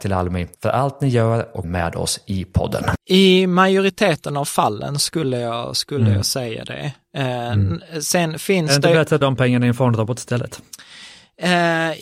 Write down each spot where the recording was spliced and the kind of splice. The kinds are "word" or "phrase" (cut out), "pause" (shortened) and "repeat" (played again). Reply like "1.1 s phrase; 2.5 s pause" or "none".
1.6 s phrase; 9.2 s phrase